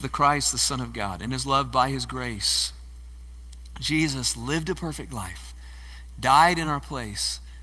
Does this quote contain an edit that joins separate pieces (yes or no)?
no